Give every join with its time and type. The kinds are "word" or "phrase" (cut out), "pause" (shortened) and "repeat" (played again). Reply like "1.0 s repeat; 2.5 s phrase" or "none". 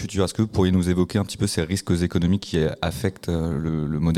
none